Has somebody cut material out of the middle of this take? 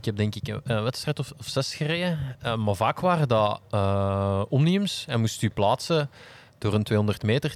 no; 0 cuts

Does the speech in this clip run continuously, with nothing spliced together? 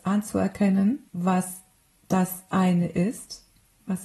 no; 1 cut; at 1.1 s

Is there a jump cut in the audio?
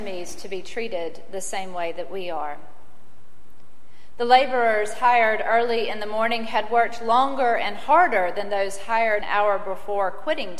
yes; 1 cut; at 9.2 s

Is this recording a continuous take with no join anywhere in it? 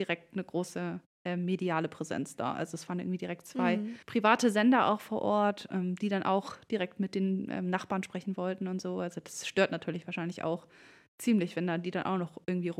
no; 1 cut; at 4.0 s

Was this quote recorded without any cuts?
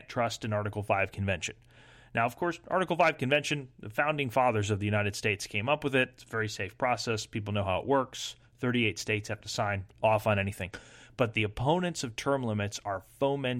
yes; 0 cuts

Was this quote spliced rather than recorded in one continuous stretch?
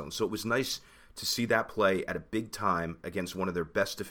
no; 0 cuts

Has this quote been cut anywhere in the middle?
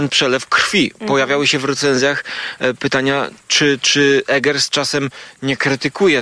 yes; 1 cut; at 3.4 s

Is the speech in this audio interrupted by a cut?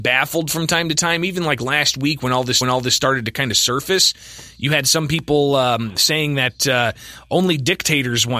yes; 1 cut; at 2.6 s

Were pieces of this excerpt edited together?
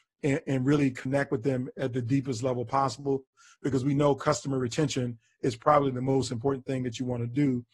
no; 0 cuts

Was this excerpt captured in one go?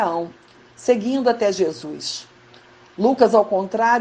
yes; 0 cuts

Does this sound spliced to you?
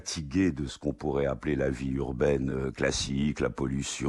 no; 0 cuts

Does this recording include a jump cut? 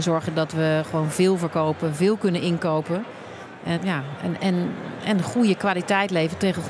yes; 2 cuts; at 3.8 s, 4.4 s

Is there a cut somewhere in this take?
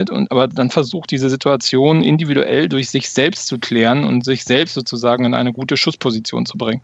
no; 0 cuts

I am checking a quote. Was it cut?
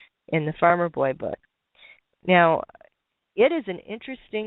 no; 0 cuts

